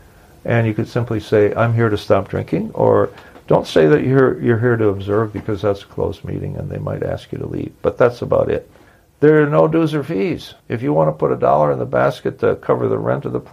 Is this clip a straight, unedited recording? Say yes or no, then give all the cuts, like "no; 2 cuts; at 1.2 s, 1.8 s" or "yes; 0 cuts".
no; 2 cuts; at 8.9 s, 10.6 s